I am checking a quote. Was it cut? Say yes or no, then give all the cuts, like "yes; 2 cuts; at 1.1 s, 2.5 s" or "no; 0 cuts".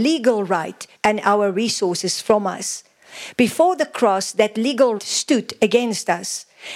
yes; 2 cuts; at 1.0 s, 5.0 s